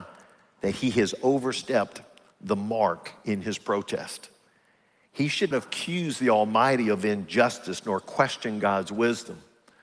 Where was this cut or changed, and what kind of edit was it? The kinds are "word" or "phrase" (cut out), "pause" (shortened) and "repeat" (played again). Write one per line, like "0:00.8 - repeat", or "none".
0:05.5 - word